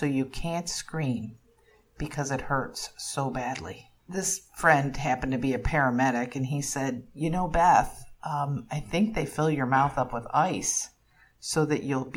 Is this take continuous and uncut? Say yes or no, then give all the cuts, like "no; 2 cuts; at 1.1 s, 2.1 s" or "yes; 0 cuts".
no; 1 cut; at 4.0 s